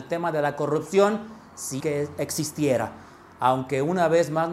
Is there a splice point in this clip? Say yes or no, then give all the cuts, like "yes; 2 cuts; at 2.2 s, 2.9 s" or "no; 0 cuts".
yes; 1 cut; at 1.8 s